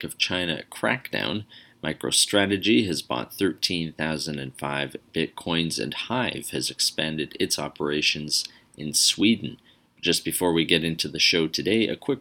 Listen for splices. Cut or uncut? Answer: uncut